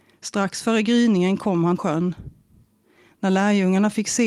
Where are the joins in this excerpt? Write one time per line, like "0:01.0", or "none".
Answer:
0:01.8

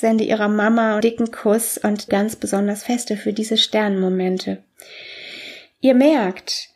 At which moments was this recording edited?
0:01.0
0:02.1

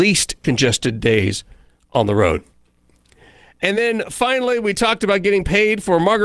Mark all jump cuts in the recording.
none

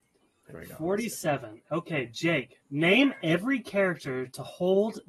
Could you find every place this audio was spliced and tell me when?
0:02.6

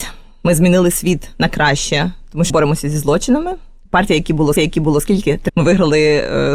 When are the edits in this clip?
0:02.5
0:04.6
0:05.5

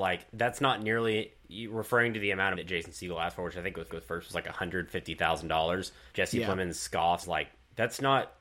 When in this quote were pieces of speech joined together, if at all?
0:02.5
0:03.9
0:06.1
0:07.2

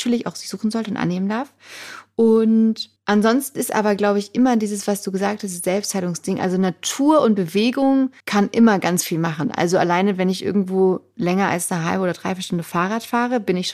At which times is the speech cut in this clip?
0:03.0
0:08.2

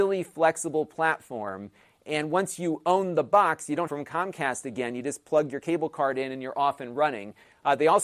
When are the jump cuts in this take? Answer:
0:03.9

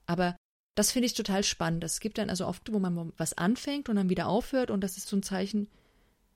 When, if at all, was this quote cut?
0:02.7
0:03.2
0:05.0

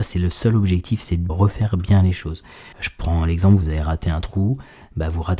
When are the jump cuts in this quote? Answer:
0:01.3
0:02.7

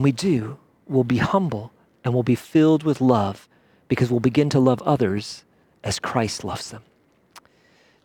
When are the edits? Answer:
none

